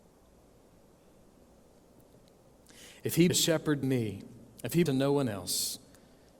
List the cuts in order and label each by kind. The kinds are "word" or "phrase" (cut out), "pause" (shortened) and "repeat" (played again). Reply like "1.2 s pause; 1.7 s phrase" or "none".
3.3 s word; 3.8 s word; 4.9 s phrase